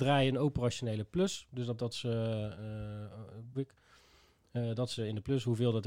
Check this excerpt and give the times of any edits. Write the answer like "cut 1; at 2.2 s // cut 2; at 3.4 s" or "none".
cut 1; at 1.8 s // cut 2; at 3.5 s // cut 3; at 5.0 s

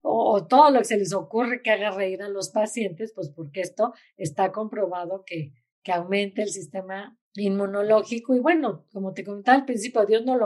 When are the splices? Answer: cut 1; at 7.2 s

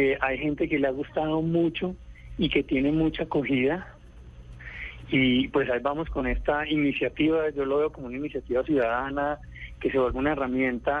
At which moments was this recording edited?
none

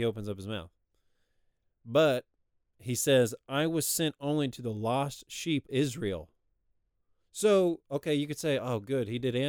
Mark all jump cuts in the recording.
cut 1; at 5.7 s

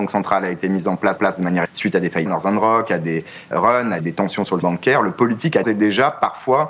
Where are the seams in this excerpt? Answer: cut 1; at 1.2 s // cut 2; at 1.6 s // cut 3; at 2.3 s // cut 4; at 3.5 s // cut 5; at 4.0 s // cut 6; at 4.6 s // cut 7; at 5.6 s

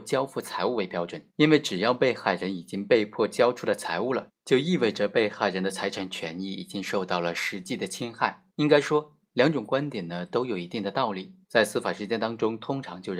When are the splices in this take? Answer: cut 1; at 1.3 s // cut 2; at 4.4 s // cut 3; at 8.5 s // cut 4; at 11.4 s

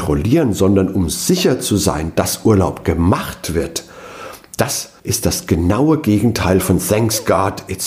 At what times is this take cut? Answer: cut 1; at 5.0 s

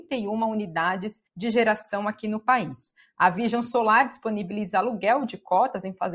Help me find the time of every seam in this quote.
cut 1; at 1.3 s

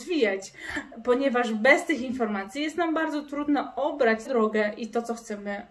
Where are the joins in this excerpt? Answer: cut 1; at 4.2 s

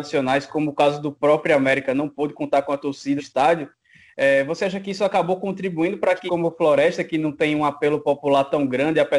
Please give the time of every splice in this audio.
cut 1; at 3.2 s // cut 2; at 6.3 s

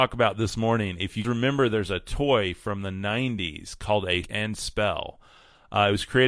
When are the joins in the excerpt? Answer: cut 1; at 1.2 s // cut 2; at 4.2 s

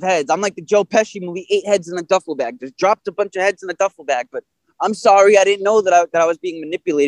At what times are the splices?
none

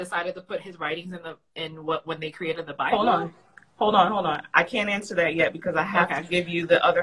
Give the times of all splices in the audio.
none

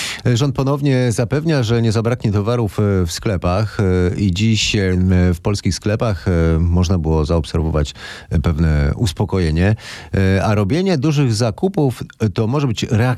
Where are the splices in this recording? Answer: none

